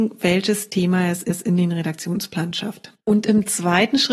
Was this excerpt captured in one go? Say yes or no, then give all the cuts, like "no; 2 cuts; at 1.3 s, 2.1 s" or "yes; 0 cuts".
no; 2 cuts; at 1.3 s, 3.0 s